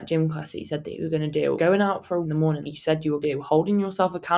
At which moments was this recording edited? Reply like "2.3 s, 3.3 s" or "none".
1.6 s, 2.2 s, 2.6 s, 3.2 s

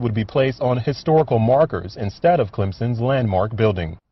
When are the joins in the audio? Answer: none

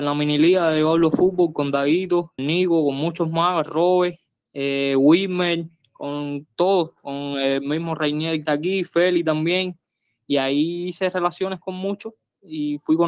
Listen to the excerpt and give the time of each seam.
2.4 s, 4.4 s, 8.5 s

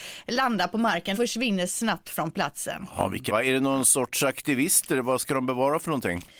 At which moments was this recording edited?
1.1 s, 3.3 s

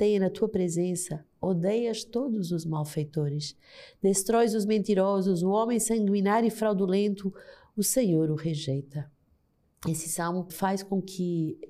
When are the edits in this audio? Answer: 10.5 s

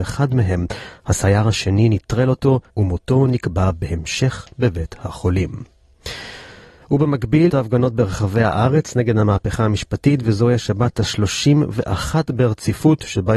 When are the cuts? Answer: 2.7 s, 7.5 s

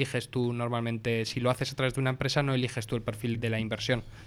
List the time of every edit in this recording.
3.3 s

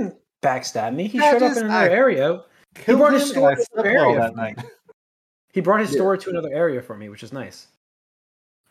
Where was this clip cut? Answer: none

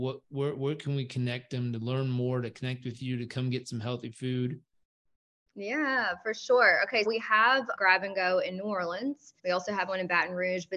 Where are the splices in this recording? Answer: 7.0 s, 7.7 s, 9.4 s

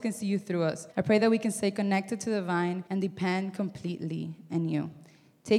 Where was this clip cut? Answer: 0.9 s, 2.9 s

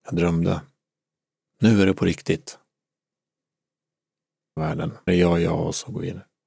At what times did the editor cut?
4.6 s, 5.1 s

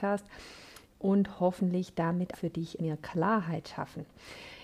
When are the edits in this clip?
2.3 s, 2.8 s

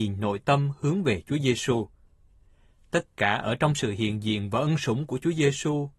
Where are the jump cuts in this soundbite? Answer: none

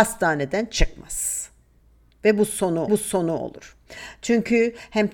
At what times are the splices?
2.9 s

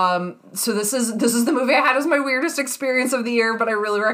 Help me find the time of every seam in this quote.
none

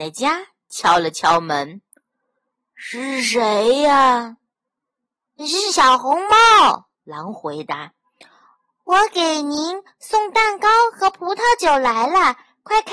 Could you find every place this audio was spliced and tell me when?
6.9 s

